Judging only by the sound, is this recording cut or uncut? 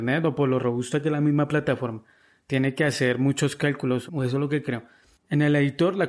cut